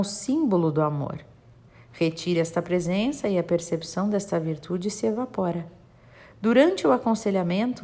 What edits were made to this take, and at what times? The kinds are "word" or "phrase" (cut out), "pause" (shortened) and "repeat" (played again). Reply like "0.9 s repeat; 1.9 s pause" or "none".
none